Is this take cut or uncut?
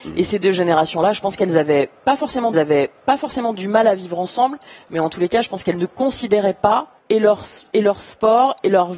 cut